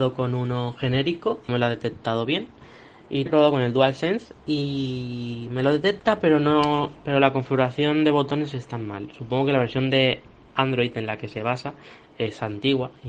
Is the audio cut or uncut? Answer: cut